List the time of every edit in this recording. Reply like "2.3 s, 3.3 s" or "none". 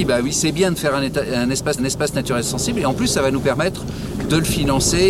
1.8 s